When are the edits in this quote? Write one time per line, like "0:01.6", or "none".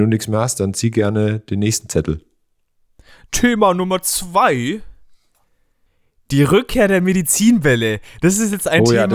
none